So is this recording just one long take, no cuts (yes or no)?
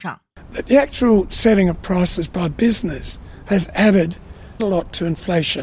no